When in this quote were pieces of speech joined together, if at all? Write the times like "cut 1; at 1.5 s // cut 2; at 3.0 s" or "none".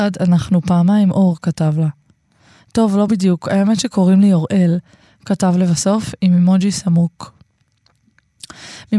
none